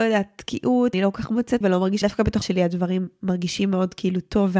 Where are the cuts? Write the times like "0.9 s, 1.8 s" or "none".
0.9 s, 1.6 s, 2.0 s, 2.4 s